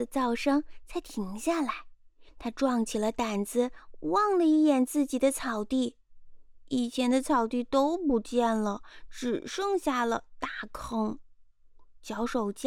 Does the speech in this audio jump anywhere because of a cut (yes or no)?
yes